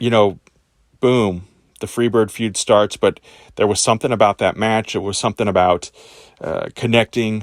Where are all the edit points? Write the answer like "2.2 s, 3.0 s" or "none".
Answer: none